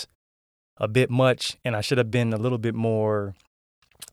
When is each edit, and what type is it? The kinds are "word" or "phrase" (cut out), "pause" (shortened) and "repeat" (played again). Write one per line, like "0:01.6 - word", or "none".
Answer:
none